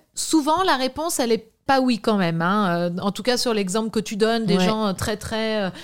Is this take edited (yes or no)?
yes